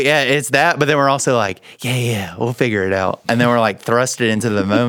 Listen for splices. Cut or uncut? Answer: uncut